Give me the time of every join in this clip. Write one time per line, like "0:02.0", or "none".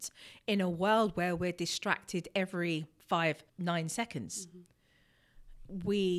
0:03.5